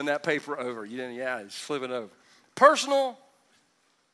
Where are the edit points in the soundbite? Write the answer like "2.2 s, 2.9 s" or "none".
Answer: none